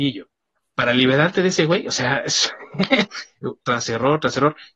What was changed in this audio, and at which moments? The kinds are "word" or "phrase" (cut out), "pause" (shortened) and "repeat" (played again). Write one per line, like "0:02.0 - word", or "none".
0:03.6 - word